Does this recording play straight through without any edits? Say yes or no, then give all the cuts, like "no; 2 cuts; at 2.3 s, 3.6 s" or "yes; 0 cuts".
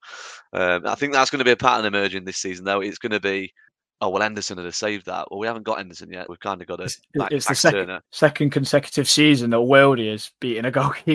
no; 3 cuts; at 3.7 s, 6.3 s, 8.1 s